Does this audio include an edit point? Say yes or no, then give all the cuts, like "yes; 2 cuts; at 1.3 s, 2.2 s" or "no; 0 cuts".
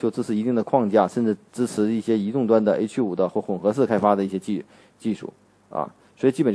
yes; 1 cut; at 1.5 s